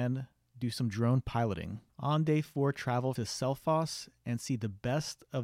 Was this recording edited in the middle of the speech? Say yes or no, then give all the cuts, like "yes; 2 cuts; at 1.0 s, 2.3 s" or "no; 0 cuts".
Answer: yes; 2 cuts; at 1.9 s, 3.2 s